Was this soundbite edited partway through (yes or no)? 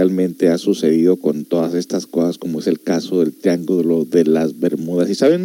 no